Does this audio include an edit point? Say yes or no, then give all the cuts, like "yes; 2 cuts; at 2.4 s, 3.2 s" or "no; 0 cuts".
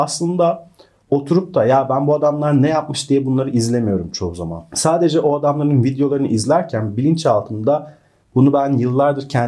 no; 0 cuts